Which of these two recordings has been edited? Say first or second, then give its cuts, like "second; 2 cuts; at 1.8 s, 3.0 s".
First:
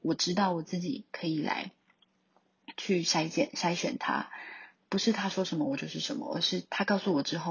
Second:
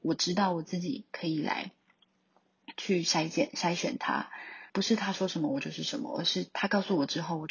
second; 1 cut; at 4.7 s